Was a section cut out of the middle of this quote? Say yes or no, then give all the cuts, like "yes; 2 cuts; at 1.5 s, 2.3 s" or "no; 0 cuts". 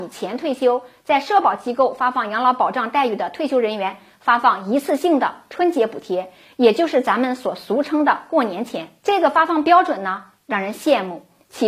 no; 0 cuts